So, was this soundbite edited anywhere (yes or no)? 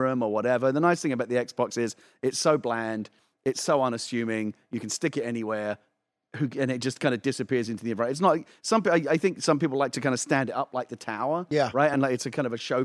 no